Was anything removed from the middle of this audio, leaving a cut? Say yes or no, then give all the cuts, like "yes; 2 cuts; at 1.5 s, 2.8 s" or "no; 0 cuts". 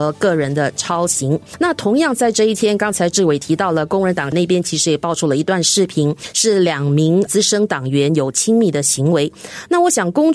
no; 0 cuts